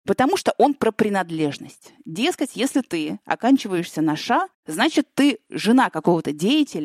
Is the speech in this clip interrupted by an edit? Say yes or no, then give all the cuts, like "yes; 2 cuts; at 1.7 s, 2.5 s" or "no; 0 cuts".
yes; 1 cut; at 4.5 s